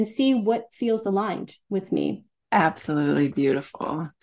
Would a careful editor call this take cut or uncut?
cut